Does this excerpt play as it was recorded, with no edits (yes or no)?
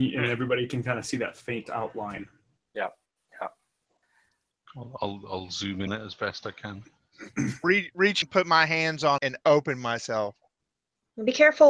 no